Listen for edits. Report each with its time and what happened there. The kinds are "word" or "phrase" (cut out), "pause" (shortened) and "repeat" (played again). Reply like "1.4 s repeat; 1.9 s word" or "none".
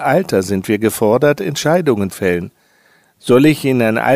2.1 s word